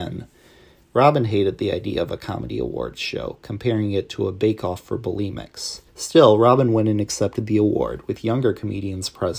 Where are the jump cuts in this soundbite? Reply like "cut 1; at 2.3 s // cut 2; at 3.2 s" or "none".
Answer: cut 1; at 5.9 s